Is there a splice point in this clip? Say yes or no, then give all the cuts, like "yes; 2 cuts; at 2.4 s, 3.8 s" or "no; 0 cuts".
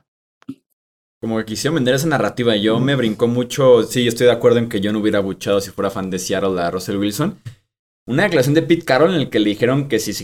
no; 0 cuts